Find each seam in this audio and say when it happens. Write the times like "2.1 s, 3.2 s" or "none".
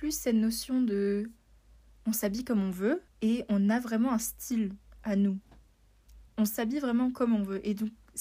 3.1 s, 6.3 s